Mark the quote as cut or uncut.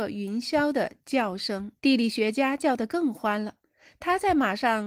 cut